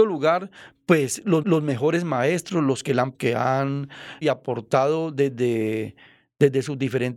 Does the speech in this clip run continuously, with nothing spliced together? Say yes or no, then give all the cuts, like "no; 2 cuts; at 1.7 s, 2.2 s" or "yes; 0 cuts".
no; 3 cuts; at 1.4 s, 3.1 s, 4.2 s